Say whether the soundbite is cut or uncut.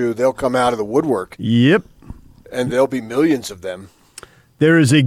uncut